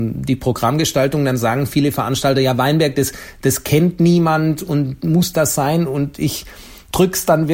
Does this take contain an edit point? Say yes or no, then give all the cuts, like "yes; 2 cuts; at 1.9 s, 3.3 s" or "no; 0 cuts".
no; 0 cuts